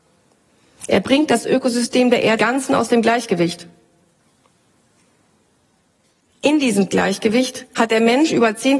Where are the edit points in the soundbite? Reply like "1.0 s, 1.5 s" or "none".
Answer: 2.4 s